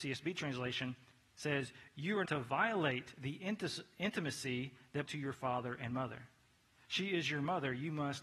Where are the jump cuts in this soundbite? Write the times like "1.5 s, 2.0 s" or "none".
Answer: 2.3 s, 5.1 s